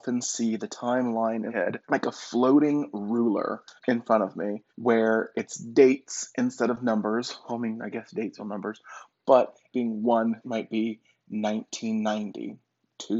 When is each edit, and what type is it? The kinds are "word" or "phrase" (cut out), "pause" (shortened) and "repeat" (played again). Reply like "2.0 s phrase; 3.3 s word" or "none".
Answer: 1.5 s word; 1.8 s pause; 3.8 s pause; 4.7 s pause; 8.4 s word; 9.7 s phrase; 10.4 s phrase